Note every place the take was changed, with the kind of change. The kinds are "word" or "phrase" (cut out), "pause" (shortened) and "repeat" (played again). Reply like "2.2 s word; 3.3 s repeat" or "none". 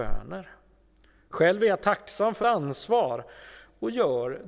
2.4 s phrase